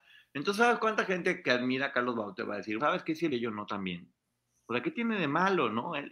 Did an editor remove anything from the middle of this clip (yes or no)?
yes